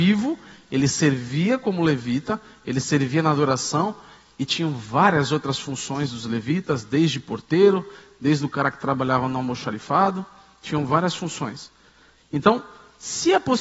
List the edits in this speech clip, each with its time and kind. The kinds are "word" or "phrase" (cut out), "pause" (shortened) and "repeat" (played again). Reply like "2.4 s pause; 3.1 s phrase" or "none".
none